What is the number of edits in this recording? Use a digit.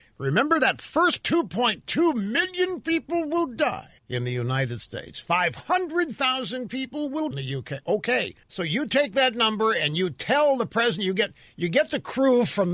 4